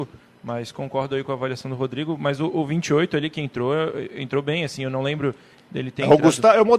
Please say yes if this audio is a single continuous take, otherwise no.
yes